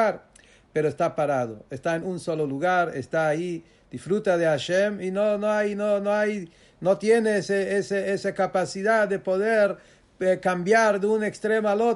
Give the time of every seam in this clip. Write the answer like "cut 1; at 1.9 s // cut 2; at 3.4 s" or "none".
none